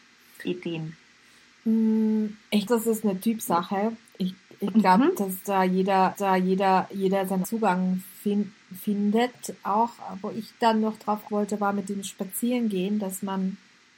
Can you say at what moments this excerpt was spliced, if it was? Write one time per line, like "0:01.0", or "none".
0:02.7
0:04.1
0:06.2
0:07.4
0:11.3